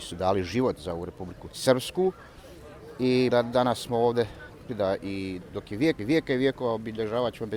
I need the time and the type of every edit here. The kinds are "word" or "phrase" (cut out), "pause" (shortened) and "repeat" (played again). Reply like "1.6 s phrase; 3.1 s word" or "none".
1.5 s word; 3.3 s phrase; 4.7 s phrase; 6.0 s repeat

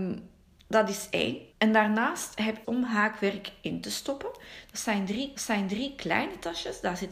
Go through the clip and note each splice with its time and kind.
1.5 s pause; 2.6 s phrase; 5.3 s repeat

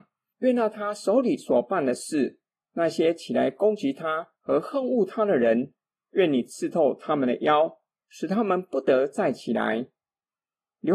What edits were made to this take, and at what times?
4.4 s pause

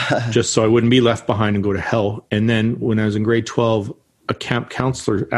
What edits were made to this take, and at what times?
none

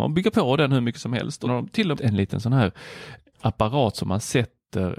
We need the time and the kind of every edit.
1.4 s word; 1.9 s phrase; 3.3 s word

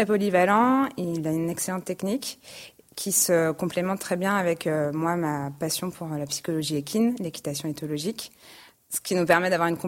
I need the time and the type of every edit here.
none

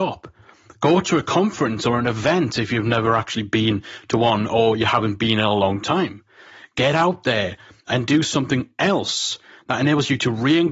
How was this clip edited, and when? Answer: none

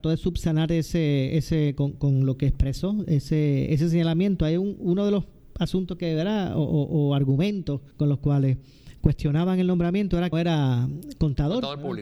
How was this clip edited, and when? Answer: 7.9 s pause; 10.3 s phrase

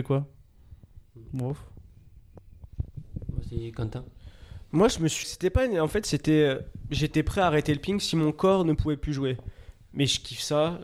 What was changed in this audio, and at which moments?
5.2 s phrase

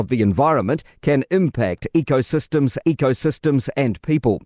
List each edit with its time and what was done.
2.8 s repeat

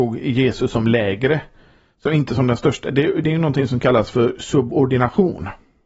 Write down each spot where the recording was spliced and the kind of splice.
none

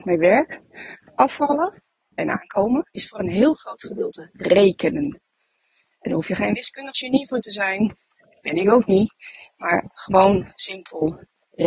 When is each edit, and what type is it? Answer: 2.9 s pause

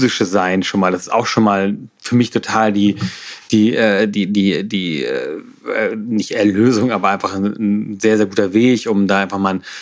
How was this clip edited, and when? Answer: none

